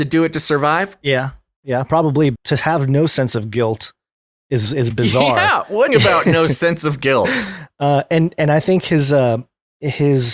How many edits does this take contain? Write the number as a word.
four